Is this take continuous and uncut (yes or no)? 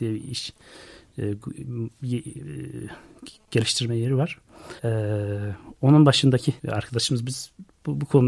no